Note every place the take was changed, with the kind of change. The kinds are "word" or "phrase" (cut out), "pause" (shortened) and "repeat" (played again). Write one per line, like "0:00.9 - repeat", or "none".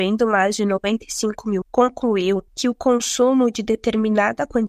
0:01.6 - word
0:02.5 - pause